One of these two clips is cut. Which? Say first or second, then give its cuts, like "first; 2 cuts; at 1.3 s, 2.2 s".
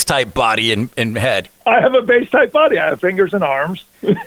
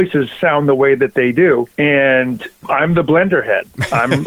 first; 1 cut; at 3.0 s